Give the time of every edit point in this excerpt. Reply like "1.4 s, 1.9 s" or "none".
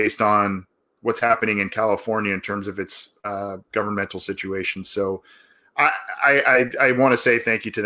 3.6 s